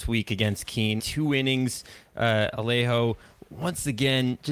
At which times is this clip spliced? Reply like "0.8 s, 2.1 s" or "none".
1.0 s